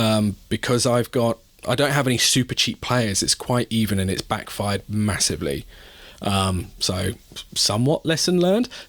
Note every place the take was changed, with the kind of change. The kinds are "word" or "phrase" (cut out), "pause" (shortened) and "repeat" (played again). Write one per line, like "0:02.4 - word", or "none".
none